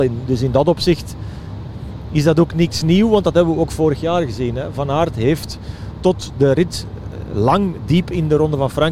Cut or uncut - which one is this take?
uncut